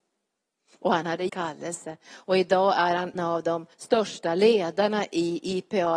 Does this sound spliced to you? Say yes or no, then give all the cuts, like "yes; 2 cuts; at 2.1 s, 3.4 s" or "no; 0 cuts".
yes; 3 cuts; at 1.3 s, 3.2 s, 3.7 s